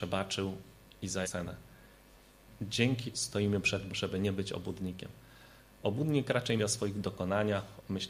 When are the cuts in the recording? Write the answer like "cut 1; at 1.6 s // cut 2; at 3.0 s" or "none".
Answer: cut 1; at 1.2 s // cut 2; at 3.1 s // cut 3; at 3.9 s // cut 4; at 6.6 s